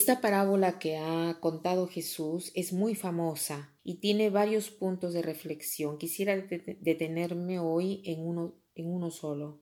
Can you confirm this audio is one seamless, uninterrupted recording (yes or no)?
no